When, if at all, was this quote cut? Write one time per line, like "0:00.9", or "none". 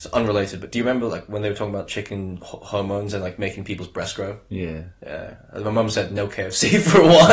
none

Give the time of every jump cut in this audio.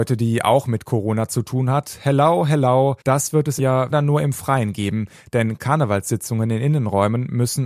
0:03.0
0:03.6
0:03.9
0:05.6

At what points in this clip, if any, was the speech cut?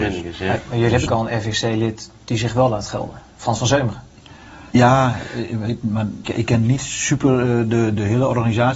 0:01.1
0:04.7
0:06.2

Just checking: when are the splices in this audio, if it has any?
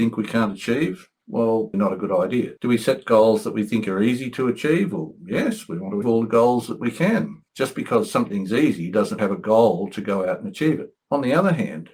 0:01.7
0:06.0
0:07.5
0:09.2

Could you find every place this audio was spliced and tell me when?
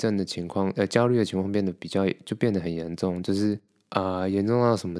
none

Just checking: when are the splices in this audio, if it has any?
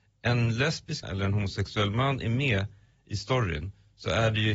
0:01.0

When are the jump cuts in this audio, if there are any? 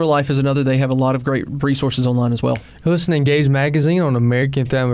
none

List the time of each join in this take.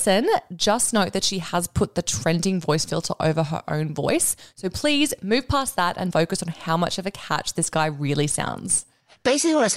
0:06.1

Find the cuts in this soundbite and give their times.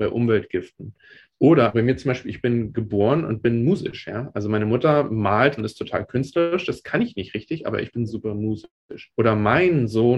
0:01.7
0:05.6
0:08.1
0:09.1

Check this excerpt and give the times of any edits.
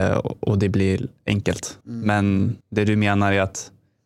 0:01.8
0:02.6

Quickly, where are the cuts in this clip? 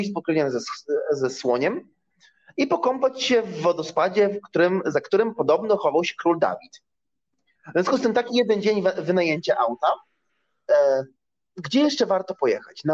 none

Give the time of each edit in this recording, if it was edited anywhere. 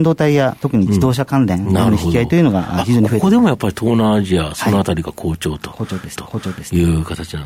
0:06.2

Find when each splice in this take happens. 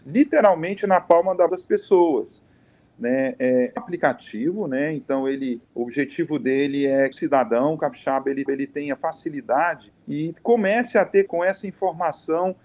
0:01.5
0:03.8
0:05.6
0:07.1
0:08.5
0:10.0
0:11.3

